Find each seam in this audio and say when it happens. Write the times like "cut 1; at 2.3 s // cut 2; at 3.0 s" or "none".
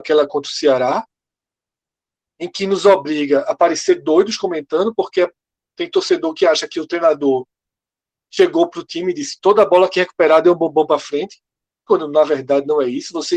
none